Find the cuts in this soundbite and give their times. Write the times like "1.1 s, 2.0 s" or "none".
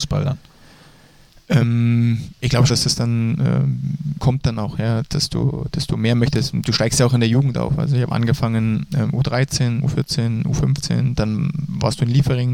2.7 s, 4.2 s, 5.0 s, 9.8 s